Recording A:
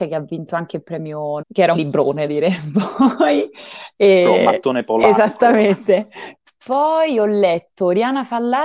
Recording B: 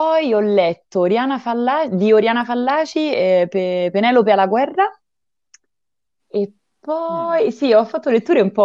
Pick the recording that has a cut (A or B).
A